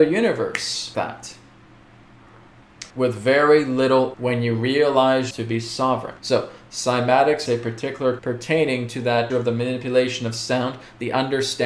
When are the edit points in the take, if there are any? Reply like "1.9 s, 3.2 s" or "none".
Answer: 0.9 s, 2.9 s, 4.1 s, 5.3 s, 6.2 s, 7.5 s, 8.2 s, 9.3 s

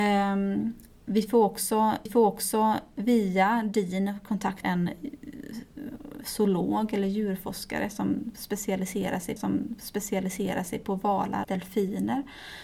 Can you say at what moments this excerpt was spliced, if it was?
2.1 s, 4.6 s, 9.4 s, 11.4 s

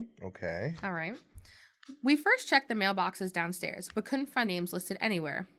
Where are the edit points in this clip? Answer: 4.4 s

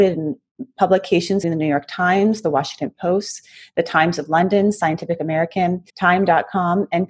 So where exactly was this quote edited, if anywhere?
1.4 s, 5.9 s

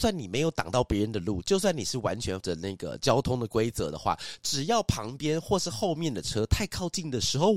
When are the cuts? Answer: 2.4 s

